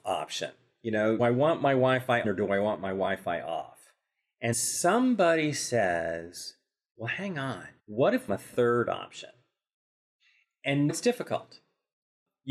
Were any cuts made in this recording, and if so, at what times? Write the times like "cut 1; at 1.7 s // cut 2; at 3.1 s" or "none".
cut 1; at 1.2 s // cut 2; at 2.2 s // cut 3; at 4.5 s // cut 4; at 7.8 s // cut 5; at 8.3 s // cut 6; at 10.9 s